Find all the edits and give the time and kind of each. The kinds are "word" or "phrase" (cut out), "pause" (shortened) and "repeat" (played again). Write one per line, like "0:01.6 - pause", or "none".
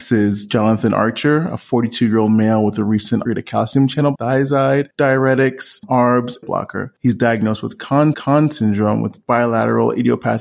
0:03.3 - phrase
0:04.2 - word
0:06.4 - phrase
0:07.0 - pause
0:08.1 - repeat